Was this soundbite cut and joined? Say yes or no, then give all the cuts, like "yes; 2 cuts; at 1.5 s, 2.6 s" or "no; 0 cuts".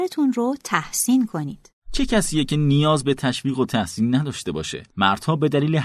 yes; 2 cuts; at 1.8 s, 4.9 s